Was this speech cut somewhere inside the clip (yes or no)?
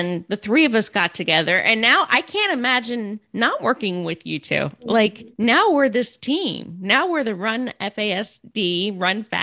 no